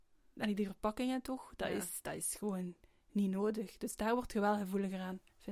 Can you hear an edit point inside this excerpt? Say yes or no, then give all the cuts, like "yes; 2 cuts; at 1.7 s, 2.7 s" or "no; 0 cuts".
no; 0 cuts